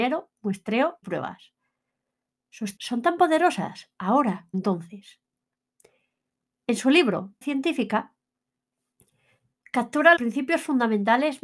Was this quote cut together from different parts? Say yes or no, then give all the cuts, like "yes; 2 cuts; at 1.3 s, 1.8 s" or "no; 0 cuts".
yes; 5 cuts; at 1.0 s, 2.8 s, 4.5 s, 7.4 s, 10.2 s